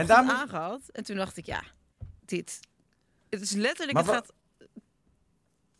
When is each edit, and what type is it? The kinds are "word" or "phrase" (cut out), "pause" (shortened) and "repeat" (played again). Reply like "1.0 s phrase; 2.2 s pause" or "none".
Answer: 2.2 s word